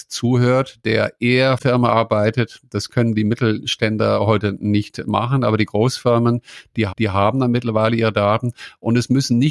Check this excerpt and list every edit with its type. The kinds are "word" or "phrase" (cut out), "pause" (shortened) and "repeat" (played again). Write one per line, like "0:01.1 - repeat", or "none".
0:01.6 - phrase
0:06.9 - repeat